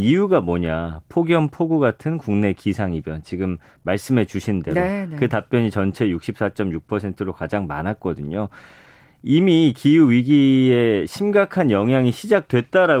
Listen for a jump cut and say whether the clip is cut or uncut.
uncut